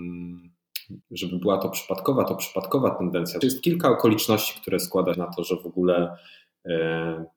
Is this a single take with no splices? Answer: no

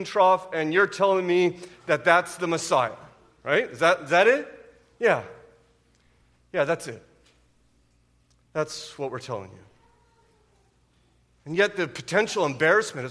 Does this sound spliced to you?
no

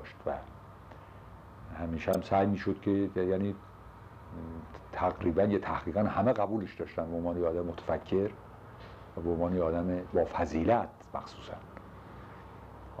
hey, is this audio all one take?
yes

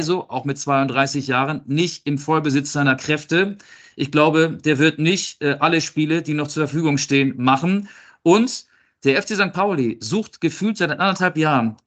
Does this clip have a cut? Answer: no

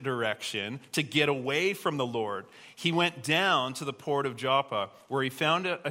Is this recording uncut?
yes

